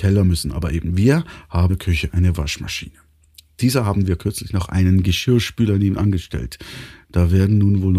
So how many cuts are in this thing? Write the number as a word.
one